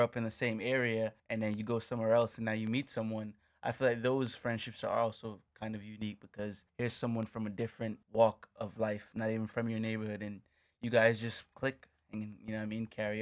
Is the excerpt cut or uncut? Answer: cut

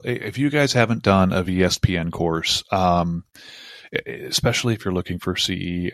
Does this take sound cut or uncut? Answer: uncut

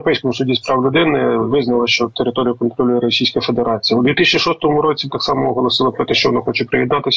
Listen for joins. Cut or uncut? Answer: cut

